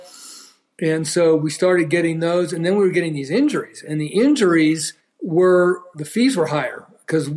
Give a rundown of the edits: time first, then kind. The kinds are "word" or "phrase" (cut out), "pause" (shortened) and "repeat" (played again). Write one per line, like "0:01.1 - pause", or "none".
0:05.0 - pause